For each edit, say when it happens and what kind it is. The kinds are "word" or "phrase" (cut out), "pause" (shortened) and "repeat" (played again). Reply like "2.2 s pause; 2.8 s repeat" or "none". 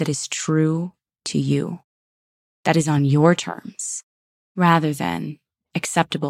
none